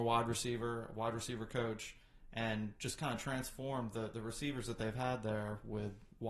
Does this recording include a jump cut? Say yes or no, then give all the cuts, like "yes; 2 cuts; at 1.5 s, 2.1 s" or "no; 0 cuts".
no; 0 cuts